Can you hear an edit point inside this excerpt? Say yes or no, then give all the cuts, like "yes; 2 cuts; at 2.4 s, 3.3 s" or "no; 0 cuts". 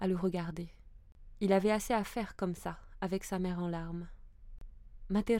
no; 0 cuts